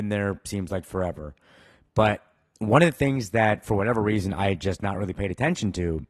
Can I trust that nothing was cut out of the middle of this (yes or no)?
yes